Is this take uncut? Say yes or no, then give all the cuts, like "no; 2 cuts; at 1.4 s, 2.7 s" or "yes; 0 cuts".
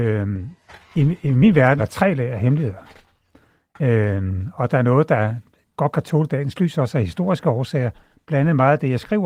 no; 1 cut; at 1.8 s